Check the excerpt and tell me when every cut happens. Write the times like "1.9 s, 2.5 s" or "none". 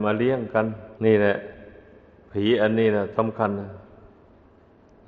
1.0 s